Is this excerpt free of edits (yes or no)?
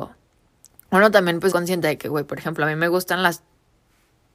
no